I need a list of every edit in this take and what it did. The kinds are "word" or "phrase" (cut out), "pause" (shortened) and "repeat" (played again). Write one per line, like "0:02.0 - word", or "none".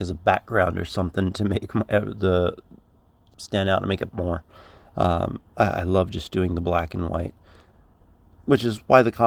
0:03.3 - phrase
0:04.1 - word
0:05.5 - pause

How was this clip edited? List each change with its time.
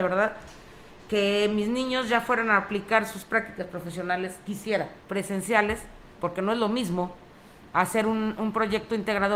0:05.0 - pause

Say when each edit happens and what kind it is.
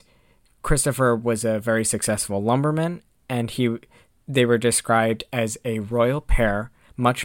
none

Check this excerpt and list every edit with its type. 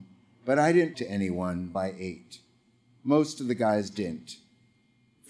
0:00.9 - word
0:01.7 - word

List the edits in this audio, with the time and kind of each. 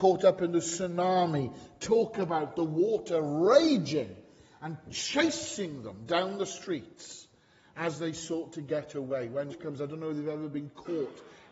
0:09.5 - word

